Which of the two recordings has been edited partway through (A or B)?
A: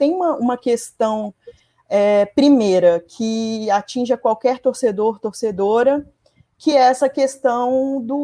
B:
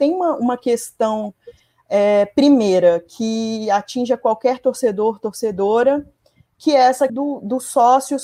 B